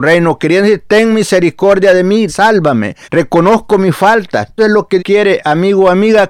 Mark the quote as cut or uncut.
cut